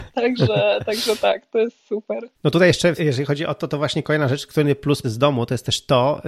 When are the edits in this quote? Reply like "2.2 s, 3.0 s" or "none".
2.3 s, 3.0 s, 5.0 s